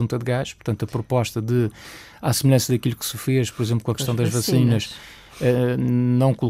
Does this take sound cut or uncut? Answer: uncut